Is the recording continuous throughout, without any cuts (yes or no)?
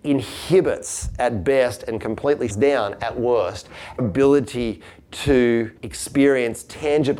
no